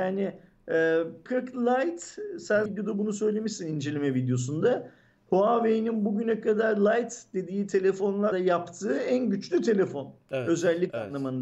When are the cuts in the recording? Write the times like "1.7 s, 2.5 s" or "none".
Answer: 1.3 s, 2.7 s, 8.3 s